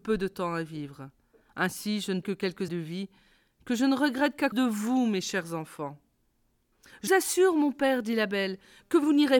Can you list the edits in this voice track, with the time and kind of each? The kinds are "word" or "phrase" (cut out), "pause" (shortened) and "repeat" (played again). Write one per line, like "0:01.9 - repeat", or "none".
0:02.2 - word
0:02.7 - word
0:04.5 - word
0:07.1 - word